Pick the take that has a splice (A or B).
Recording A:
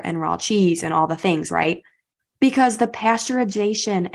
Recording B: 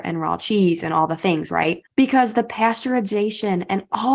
B